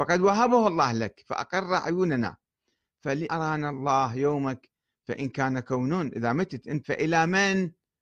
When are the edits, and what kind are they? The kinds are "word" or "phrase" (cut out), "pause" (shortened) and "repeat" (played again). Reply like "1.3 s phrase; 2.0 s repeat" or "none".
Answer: 3.3 s word; 6.8 s word